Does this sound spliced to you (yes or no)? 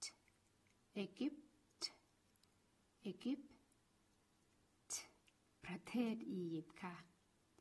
no